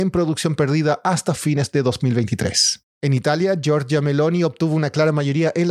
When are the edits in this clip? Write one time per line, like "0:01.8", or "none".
0:02.9